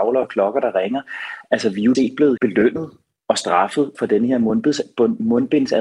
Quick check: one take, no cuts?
no; 3 cuts; at 1.9 s, 2.4 s, 3.9 s

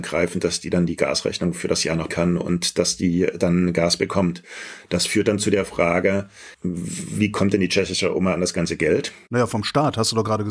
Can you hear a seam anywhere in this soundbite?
yes; 2 cuts; at 2.1 s, 6.5 s

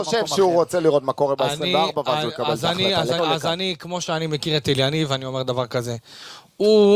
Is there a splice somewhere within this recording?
yes; 1 cut; at 3.2 s

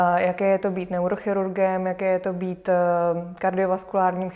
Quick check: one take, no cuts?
yes; 0 cuts

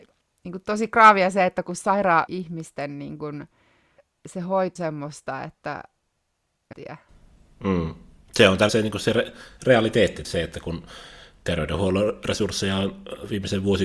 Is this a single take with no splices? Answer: no; 5 cuts; at 2.3 s, 4.8 s, 6.7 s, 8.7 s, 10.2 s

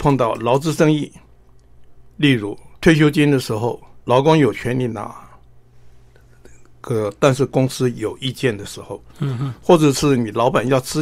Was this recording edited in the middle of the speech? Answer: yes; 3 cuts; at 2.1 s, 2.7 s, 4.0 s

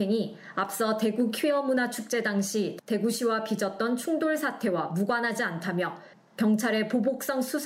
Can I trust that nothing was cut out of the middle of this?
yes; 0 cuts

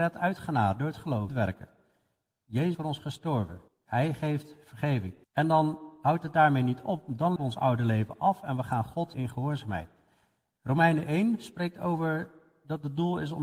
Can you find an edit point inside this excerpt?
yes; 6 cuts; at 1.3 s, 2.7 s, 3.7 s, 5.2 s, 7.4 s, 9.1 s

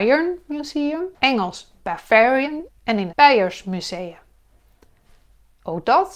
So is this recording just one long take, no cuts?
no; 3 cuts; at 1.1 s, 2.7 s, 3.1 s

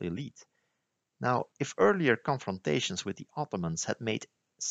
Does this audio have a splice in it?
yes; 1 cut; at 1.5 s

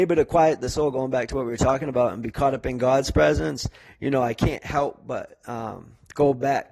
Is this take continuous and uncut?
yes; 0 cuts

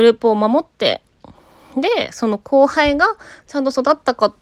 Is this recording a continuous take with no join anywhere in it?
yes; 0 cuts

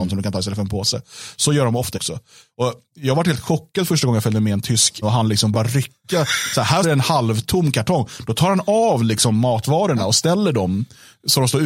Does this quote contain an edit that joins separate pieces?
yes; 4 cuts; at 1.9 s, 5.0 s, 5.5 s, 6.8 s

